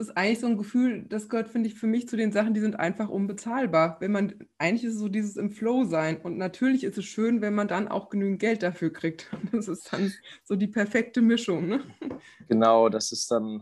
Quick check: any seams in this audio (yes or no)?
no